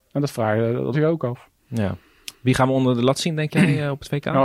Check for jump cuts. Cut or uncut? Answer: cut